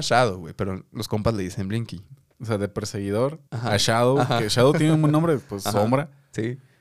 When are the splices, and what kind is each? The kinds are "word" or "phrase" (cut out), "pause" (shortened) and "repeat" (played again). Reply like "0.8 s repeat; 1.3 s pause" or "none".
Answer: 3.5 s pause